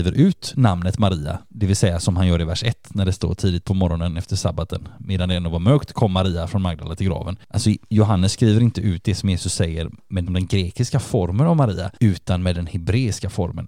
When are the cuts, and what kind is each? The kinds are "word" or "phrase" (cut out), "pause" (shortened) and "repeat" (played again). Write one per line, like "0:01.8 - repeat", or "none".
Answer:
0:10.3 - word